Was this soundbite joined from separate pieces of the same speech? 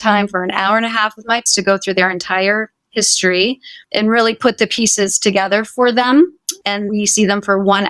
yes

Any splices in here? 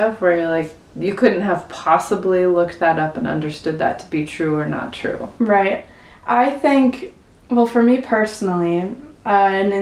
no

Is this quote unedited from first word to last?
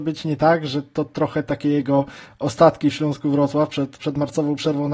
yes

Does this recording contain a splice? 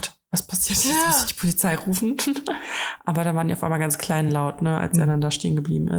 no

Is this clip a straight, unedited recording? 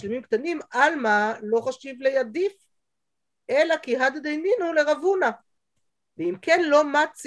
yes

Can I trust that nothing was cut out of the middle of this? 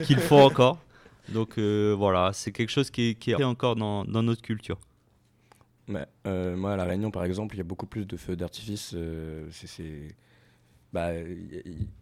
no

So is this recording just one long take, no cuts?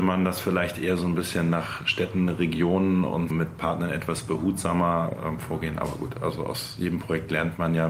no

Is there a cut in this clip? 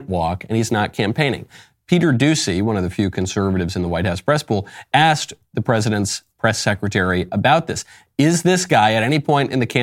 no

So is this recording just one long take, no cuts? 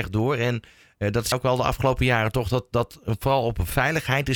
no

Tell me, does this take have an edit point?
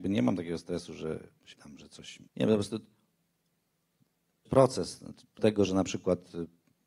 yes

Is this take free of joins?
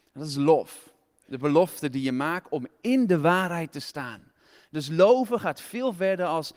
yes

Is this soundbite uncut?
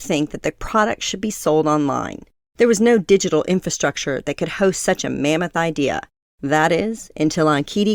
yes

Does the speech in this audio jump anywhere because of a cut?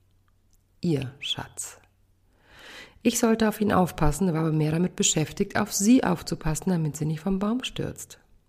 no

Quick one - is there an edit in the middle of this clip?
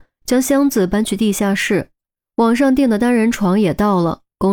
no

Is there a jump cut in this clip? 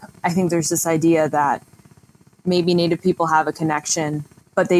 no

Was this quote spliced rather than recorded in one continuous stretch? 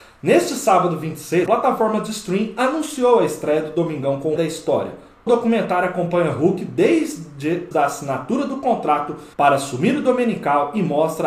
yes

